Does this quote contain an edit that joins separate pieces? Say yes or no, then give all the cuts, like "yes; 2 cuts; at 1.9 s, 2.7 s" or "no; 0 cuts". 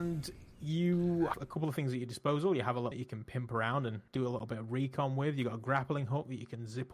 yes; 3 cuts; at 1.3 s, 2.9 s, 4.1 s